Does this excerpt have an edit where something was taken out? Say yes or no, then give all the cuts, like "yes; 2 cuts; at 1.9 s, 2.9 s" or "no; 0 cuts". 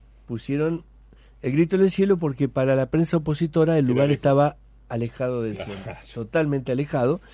no; 0 cuts